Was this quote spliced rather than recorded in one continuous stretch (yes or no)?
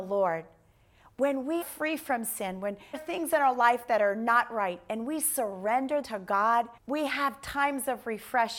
yes